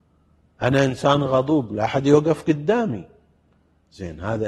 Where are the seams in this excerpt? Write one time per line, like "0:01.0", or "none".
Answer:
none